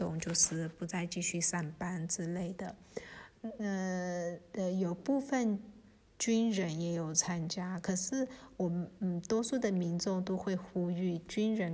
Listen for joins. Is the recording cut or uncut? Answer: uncut